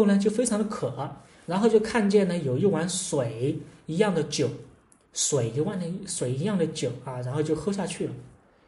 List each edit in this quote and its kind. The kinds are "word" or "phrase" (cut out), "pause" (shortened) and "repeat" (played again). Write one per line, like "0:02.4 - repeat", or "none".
none